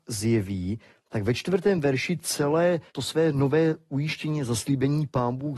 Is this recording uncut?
no; 1 cut; at 2.9 s

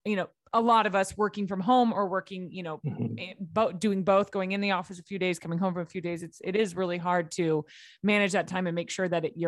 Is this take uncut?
yes; 0 cuts

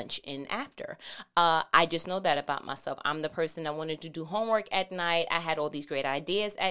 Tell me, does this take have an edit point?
no; 0 cuts

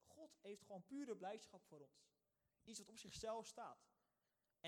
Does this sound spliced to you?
no; 0 cuts

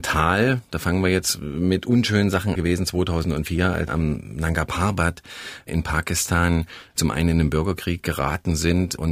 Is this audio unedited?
no; 2 cuts; at 2.6 s, 3.9 s

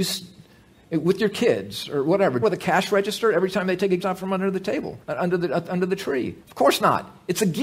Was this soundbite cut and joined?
yes; 4 cuts; at 2.4 s, 4.0 s, 5.0 s, 6.4 s

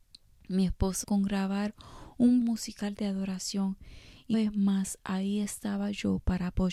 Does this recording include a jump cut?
yes; 3 cuts; at 1.0 s, 2.4 s, 4.3 s

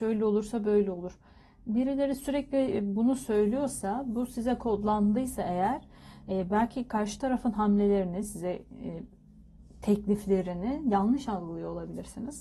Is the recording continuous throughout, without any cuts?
yes; 0 cuts

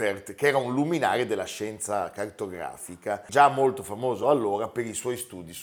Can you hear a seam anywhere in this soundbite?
no; 0 cuts

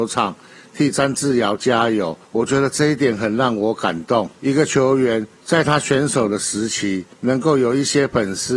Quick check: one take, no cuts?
no; 4 cuts; at 2.2 s, 4.3 s, 5.4 s, 7.1 s

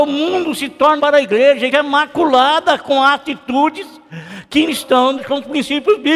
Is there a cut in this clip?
yes; 4 cuts; at 1.0 s, 1.7 s, 4.7 s, 5.2 s

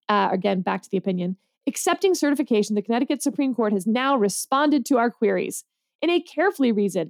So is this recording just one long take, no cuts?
yes; 0 cuts

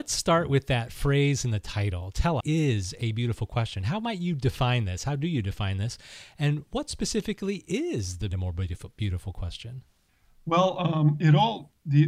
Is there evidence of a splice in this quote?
yes; 2 cuts; at 2.4 s, 8.3 s

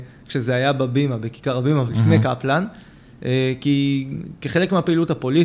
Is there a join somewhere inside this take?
yes; 1 cut; at 1.9 s

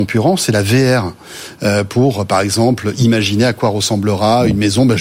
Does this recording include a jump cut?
no; 0 cuts

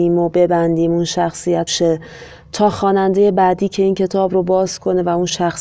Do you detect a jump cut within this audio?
yes; 1 cut; at 1.7 s

